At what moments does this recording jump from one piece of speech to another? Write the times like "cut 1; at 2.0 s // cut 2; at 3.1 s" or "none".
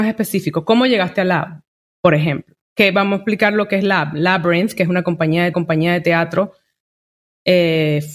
cut 1; at 2.6 s // cut 2; at 5.5 s